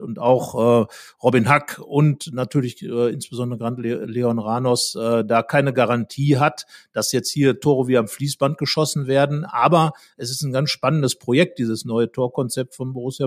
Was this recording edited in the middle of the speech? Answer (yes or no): no